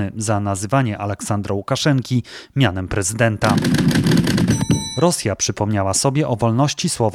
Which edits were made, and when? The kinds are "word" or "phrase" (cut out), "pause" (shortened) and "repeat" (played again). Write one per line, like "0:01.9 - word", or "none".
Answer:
none